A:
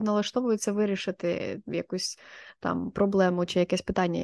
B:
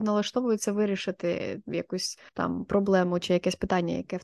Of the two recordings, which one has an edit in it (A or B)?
B